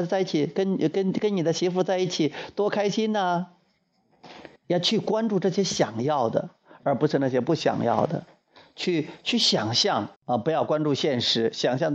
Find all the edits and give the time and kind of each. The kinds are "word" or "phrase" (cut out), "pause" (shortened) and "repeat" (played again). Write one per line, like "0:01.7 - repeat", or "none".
0:04.6 - pause
0:10.2 - pause